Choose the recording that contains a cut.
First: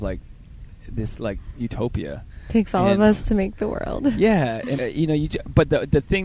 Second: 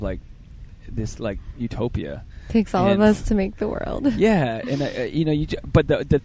first; 1 cut; at 4.8 s

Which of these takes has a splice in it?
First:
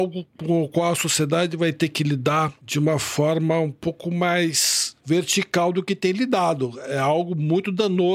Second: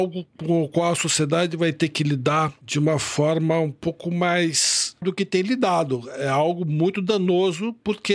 second; 1 cut; at 5.0 s

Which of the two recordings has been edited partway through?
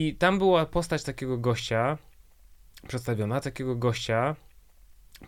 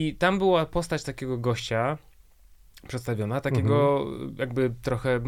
first; 1 cut; at 3.4 s

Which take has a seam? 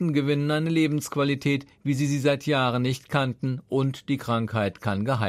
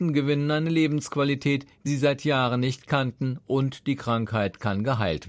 second; 1 cut; at 1.9 s

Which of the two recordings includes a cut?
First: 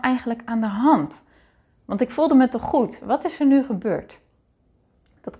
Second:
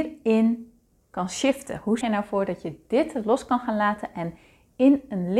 second; 1 cut; at 2.0 s

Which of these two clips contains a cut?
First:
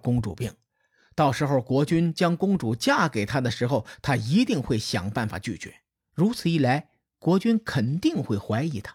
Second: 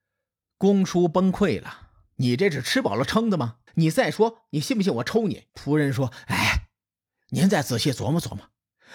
second; 2 cuts; at 3.7 s, 5.5 s

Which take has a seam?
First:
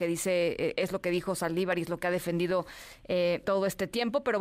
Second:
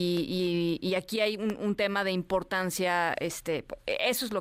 first; 1 cut; at 3.4 s

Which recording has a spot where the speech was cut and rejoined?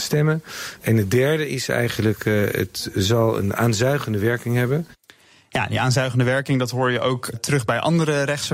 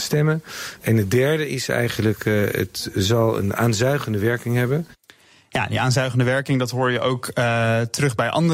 first; 1 cut; at 7.3 s

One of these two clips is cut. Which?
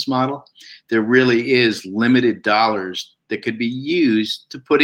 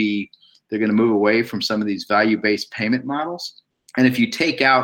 second; 1 cut; at 3.7 s

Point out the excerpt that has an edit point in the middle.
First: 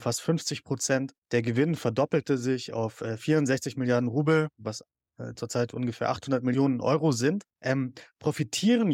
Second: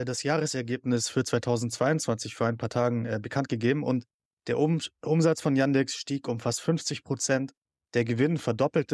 first; 2 cuts; at 1.2 s, 7.5 s

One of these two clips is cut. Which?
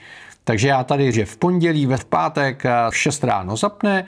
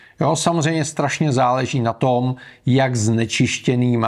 first; 3 cuts; at 1.1 s, 2.0 s, 2.9 s

